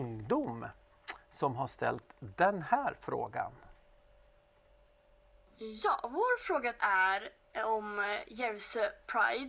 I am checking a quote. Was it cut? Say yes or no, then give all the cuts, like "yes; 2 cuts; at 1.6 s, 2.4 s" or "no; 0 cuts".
no; 0 cuts